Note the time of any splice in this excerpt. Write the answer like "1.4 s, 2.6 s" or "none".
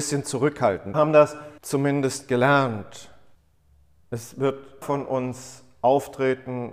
0.9 s, 1.6 s, 3.3 s, 4.8 s